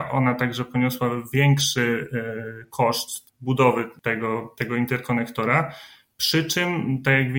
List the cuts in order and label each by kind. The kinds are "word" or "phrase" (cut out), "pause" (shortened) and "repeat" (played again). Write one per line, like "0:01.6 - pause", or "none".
none